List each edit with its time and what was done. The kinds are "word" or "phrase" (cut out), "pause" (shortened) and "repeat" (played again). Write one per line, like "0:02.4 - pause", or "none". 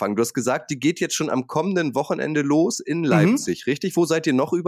none